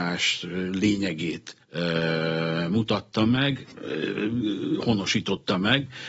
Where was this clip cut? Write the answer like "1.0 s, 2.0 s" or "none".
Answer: 1.6 s, 3.7 s